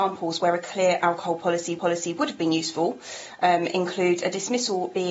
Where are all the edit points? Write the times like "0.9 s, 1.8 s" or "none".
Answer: 1.8 s